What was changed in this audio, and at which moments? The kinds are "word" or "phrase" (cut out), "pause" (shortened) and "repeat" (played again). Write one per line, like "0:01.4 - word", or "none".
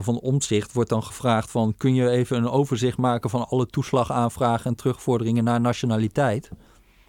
none